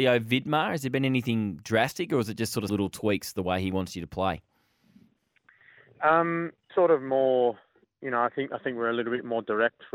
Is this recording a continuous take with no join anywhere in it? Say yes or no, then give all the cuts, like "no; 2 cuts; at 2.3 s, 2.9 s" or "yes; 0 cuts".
no; 2 cuts; at 2.7 s, 6.7 s